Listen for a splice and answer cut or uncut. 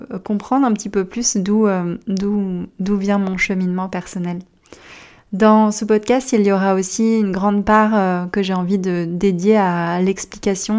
uncut